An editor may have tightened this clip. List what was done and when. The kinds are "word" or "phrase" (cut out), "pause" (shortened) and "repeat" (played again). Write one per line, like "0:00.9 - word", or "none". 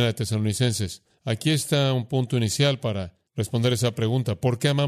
0:03.3 - pause